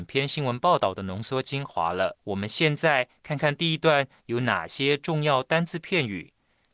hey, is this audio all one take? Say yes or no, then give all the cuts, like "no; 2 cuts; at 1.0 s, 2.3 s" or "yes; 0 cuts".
no; 1 cut; at 2.2 s